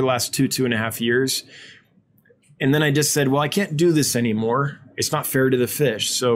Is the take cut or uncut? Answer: uncut